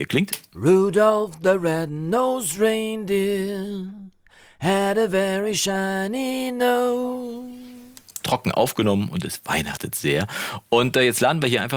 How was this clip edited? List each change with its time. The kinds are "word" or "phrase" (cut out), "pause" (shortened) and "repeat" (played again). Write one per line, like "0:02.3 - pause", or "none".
none